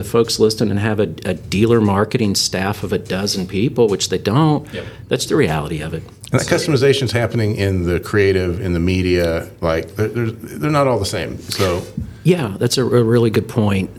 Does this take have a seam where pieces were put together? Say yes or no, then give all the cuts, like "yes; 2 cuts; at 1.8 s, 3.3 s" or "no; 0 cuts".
yes; 1 cut; at 5.3 s